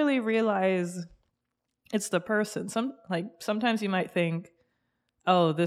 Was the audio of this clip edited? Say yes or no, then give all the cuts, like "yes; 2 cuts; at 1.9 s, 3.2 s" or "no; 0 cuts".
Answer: no; 0 cuts